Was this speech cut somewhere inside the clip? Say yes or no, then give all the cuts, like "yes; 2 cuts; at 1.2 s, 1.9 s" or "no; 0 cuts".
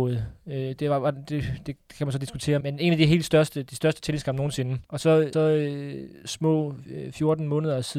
yes; 3 cuts; at 2.6 s, 4.9 s, 5.3 s